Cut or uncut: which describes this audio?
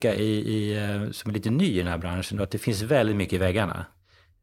uncut